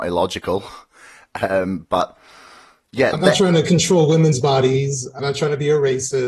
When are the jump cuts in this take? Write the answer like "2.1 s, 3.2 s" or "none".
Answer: 3.1 s, 5.2 s